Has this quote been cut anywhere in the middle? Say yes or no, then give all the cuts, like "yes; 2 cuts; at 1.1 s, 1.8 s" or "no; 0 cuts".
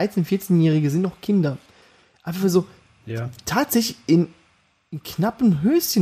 no; 0 cuts